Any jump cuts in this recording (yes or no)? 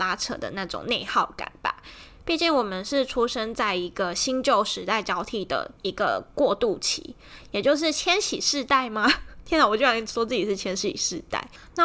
yes